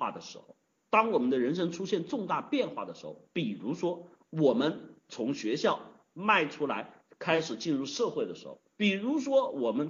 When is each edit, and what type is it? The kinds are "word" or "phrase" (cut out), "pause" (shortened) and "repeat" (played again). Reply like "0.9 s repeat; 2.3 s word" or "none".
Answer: 8.7 s pause